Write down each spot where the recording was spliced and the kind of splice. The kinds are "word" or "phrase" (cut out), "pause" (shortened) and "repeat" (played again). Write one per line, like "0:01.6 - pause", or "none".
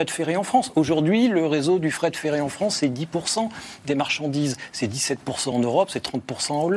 none